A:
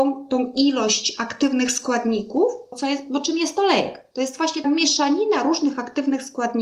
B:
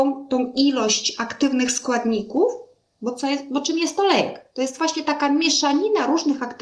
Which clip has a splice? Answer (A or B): A